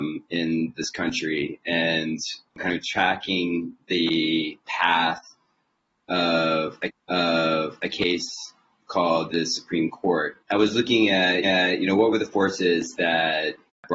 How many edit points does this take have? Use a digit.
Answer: 5